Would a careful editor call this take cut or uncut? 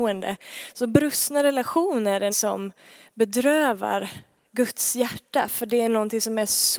cut